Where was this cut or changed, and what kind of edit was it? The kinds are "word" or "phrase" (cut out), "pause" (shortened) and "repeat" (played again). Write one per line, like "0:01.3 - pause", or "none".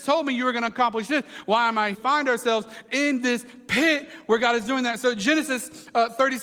0:01.9 - phrase